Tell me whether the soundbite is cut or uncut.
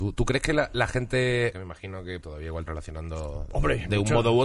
cut